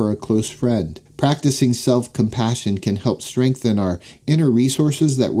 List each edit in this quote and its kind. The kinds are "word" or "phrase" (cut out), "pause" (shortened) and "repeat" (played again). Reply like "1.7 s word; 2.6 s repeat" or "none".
1.1 s pause